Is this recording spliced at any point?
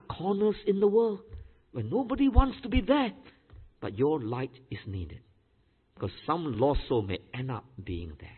no; 0 cuts

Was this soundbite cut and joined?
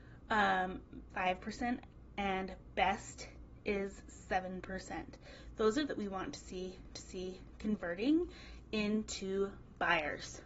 yes; 3 cuts; at 1.1 s, 5.9 s, 6.9 s

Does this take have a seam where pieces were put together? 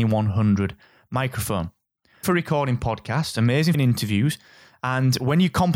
yes; 2 cuts; at 2.2 s, 3.7 s

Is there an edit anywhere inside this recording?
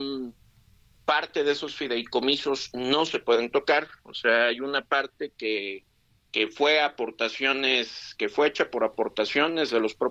no; 0 cuts

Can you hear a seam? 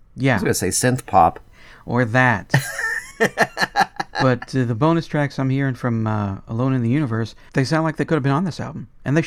yes; 1 cut; at 7.5 s

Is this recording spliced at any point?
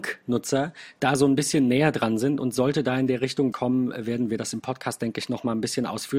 yes; 1 cut; at 3.5 s

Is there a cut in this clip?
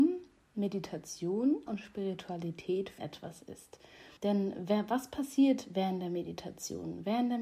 yes; 3 cuts; at 1.7 s, 3.0 s, 4.2 s

